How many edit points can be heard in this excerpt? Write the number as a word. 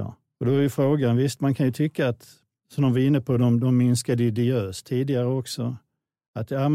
zero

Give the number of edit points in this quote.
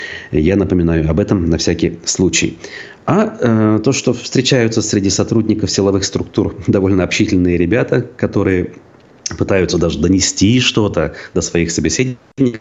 zero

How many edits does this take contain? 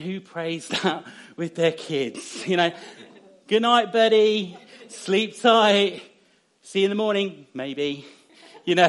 zero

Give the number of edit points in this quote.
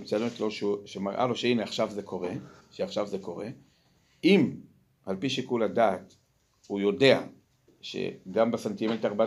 one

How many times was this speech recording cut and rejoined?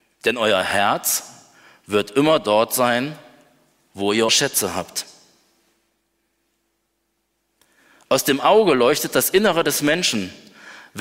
one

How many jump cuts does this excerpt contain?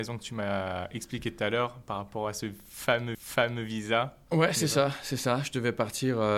one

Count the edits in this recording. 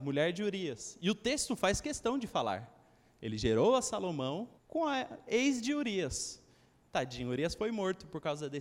one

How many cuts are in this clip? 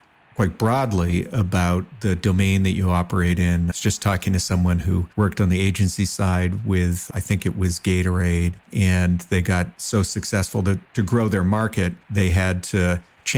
four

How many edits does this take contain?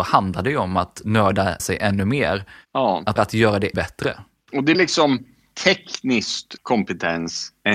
five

